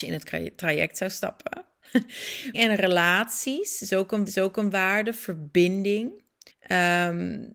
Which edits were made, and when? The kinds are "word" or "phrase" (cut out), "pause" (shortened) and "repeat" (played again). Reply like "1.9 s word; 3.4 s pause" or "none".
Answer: 2.5 s word; 4.3 s repeat; 6.5 s pause